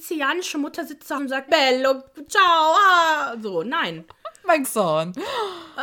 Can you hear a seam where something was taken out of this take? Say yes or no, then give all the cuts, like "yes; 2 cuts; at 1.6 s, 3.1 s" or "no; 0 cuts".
yes; 3 cuts; at 1.2 s, 1.5 s, 4.6 s